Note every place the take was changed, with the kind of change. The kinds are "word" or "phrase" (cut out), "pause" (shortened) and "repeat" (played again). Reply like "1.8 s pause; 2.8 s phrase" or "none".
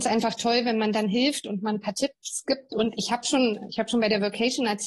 none